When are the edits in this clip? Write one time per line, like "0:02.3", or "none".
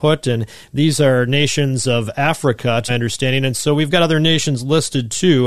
0:02.9